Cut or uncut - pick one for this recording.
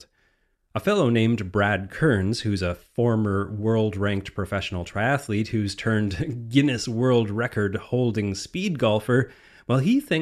uncut